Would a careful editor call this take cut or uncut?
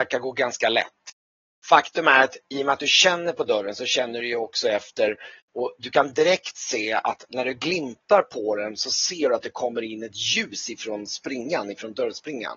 uncut